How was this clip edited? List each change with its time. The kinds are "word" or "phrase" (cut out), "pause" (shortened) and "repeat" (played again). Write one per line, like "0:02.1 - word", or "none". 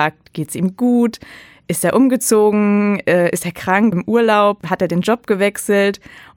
0:03.9 - word